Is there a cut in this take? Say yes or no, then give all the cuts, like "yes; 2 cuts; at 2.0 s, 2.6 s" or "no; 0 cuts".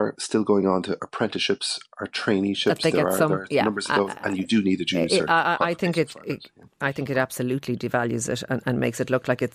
no; 0 cuts